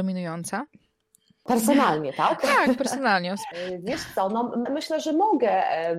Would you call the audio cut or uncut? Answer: cut